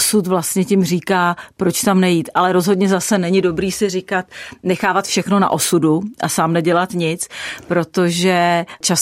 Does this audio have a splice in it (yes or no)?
no